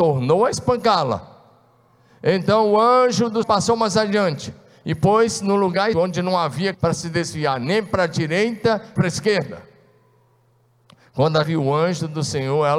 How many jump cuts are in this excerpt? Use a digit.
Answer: 5